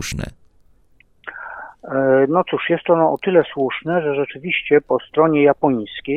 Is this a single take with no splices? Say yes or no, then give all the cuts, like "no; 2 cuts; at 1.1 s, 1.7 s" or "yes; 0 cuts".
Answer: yes; 0 cuts